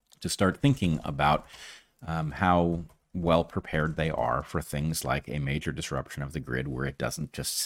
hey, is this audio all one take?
yes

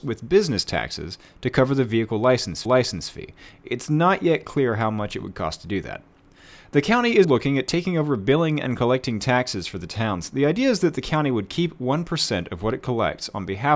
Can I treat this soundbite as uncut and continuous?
no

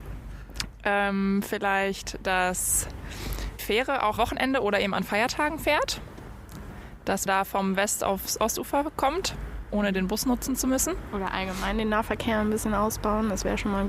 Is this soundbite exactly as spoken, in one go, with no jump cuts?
no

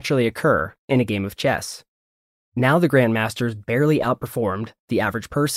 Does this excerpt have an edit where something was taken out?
no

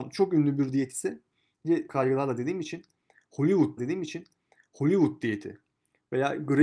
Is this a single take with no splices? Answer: no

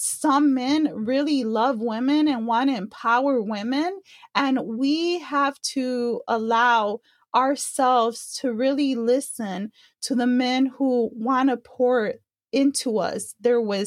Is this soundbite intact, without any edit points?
yes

